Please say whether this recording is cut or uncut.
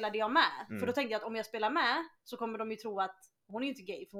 uncut